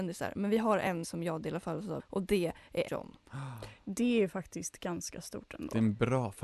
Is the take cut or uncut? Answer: cut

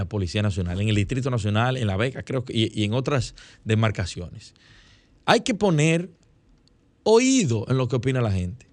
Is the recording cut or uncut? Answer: uncut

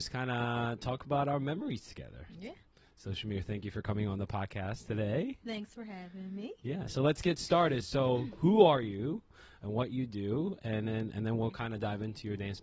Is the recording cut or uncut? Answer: uncut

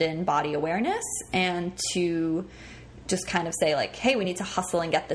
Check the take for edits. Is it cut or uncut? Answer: uncut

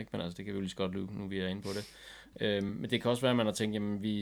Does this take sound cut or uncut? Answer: uncut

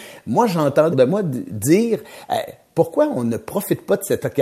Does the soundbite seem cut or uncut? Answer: cut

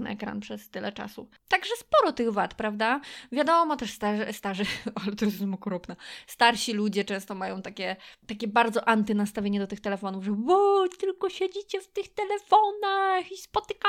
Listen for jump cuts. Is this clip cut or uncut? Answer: uncut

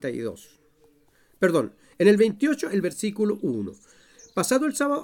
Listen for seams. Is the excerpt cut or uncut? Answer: uncut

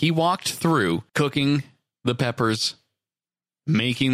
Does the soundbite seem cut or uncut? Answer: cut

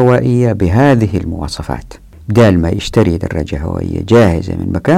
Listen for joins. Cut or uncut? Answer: uncut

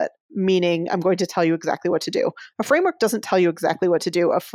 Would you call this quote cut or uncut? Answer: uncut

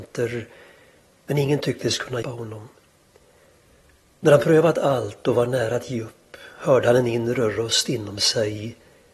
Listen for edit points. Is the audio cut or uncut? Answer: cut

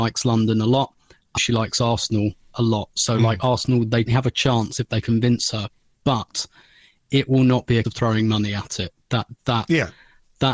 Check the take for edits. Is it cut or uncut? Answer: cut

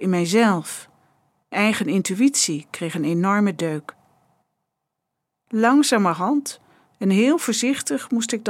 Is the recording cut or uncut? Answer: cut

